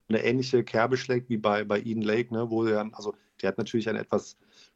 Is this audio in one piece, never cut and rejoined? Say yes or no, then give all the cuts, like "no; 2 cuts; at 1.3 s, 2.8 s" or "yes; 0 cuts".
yes; 0 cuts